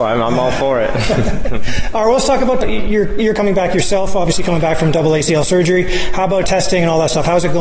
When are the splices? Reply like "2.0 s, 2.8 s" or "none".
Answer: 2.6 s, 6.4 s